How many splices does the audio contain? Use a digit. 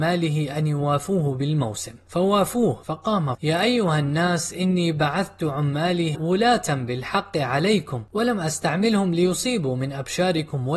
2